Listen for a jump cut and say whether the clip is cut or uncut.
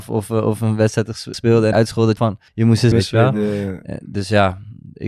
cut